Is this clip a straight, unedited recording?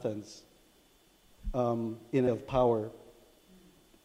no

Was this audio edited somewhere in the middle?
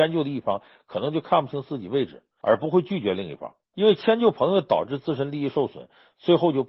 yes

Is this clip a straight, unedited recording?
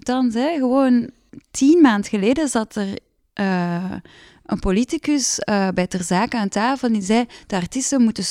yes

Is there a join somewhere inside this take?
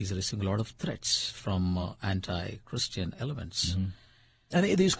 no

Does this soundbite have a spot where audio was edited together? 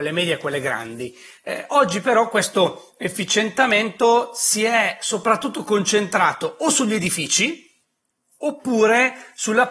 no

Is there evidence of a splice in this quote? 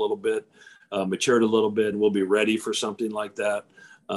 yes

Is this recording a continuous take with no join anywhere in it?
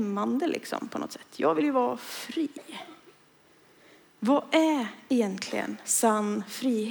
yes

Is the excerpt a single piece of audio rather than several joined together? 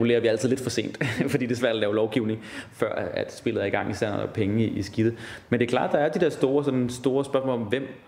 yes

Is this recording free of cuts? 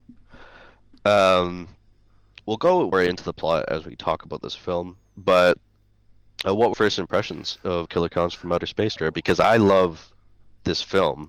no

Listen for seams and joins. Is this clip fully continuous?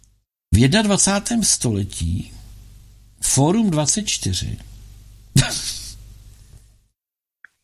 yes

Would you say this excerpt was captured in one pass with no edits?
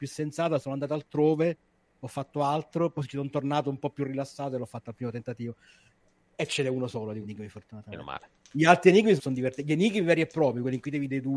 no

